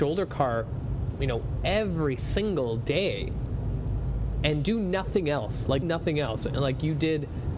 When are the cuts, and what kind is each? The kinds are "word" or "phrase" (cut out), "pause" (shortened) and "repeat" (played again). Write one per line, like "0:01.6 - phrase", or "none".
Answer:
0:05.8 - word